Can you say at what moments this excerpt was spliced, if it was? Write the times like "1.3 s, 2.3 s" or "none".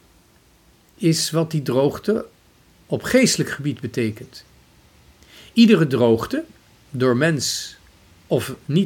none